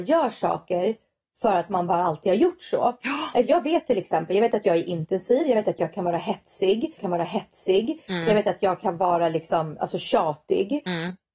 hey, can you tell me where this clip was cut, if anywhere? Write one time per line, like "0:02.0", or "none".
0:07.0